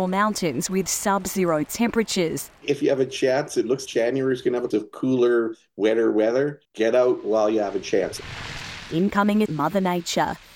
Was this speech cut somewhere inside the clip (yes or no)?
yes